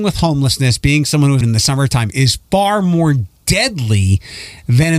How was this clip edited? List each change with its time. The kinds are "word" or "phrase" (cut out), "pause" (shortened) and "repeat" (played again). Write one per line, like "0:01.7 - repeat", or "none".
0:01.4 - word